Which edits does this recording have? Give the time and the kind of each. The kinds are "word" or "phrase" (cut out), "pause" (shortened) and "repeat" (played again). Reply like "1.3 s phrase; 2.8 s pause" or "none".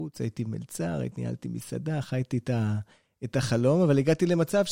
none